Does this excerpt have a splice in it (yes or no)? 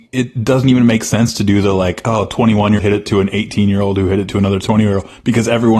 yes